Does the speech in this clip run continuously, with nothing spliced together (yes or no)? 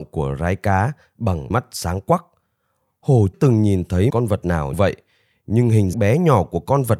no